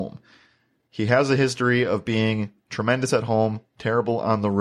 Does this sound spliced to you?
no; 0 cuts

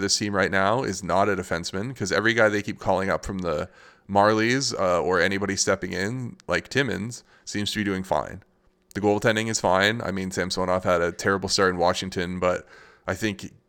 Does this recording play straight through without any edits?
yes; 0 cuts

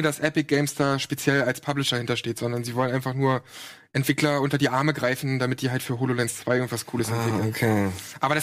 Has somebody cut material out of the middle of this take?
no; 0 cuts

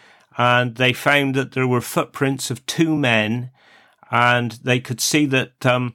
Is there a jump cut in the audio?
no; 0 cuts

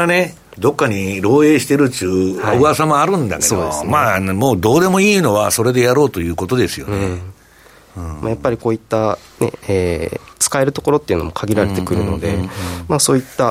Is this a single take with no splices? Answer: no; 1 cut; at 10.3 s

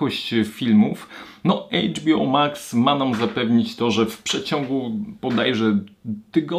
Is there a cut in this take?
no; 0 cuts

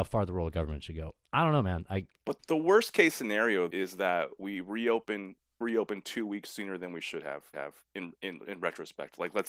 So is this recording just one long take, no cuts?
no; 4 cuts; at 2.4 s, 3.7 s, 5.6 s, 7.5 s

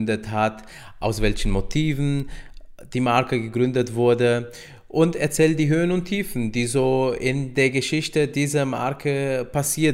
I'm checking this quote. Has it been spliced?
no; 0 cuts

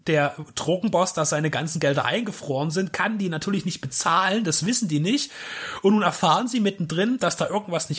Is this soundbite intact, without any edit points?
yes; 0 cuts

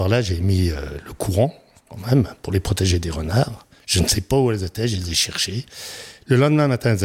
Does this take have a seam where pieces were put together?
no; 0 cuts

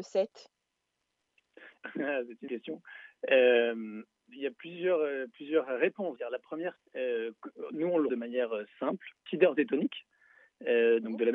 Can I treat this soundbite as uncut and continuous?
no; 7 cuts; at 1.8 s, 2.5 s, 4.3 s, 6.2 s, 6.8 s, 8.1 s, 9.3 s

